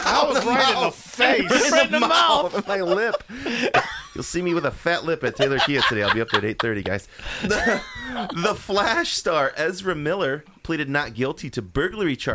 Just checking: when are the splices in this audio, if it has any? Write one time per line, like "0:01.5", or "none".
none